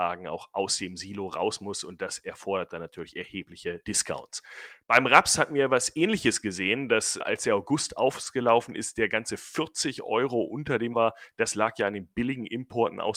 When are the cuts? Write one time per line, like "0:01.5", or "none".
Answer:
0:07.2
0:10.9